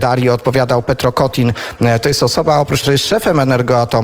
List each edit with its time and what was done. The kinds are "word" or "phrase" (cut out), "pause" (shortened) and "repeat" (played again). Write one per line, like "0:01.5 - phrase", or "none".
0:02.8 - word